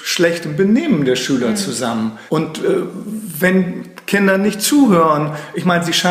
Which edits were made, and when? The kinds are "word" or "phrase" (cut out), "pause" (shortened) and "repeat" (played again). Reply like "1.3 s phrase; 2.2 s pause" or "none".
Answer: 2.3 s pause